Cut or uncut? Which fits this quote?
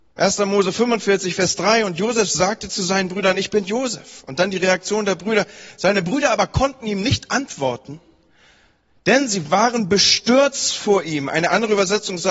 uncut